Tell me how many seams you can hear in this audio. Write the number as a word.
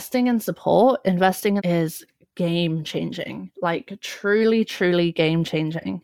two